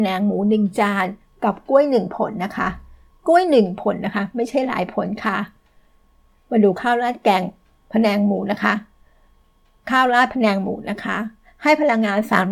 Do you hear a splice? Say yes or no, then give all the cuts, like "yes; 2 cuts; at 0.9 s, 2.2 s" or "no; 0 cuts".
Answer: no; 0 cuts